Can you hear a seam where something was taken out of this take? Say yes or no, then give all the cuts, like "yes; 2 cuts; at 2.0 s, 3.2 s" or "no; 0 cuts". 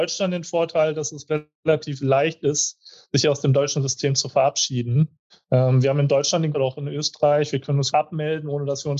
yes; 3 cuts; at 5.3 s, 6.5 s, 7.9 s